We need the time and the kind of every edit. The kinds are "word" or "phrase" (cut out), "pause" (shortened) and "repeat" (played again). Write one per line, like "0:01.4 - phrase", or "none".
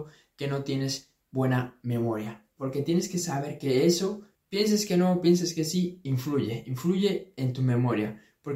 0:04.3 - pause